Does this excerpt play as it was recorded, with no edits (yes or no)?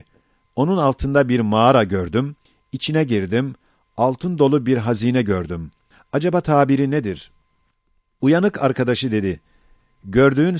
yes